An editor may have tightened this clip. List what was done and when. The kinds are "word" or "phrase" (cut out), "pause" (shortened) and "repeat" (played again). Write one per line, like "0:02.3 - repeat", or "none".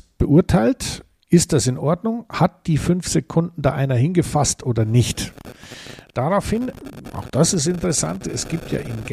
none